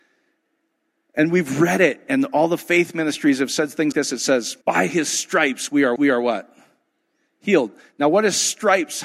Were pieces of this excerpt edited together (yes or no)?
yes